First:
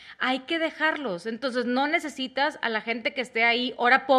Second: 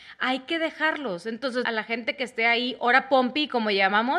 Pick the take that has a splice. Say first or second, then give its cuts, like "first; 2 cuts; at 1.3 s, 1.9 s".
second; 1 cut; at 1.6 s